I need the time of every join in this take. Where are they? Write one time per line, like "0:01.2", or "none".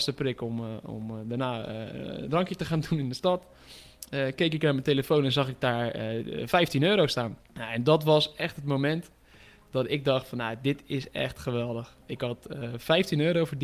0:07.4